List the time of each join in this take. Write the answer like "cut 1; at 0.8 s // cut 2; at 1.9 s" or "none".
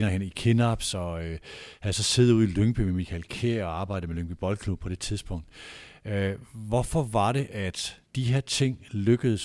cut 1; at 8.1 s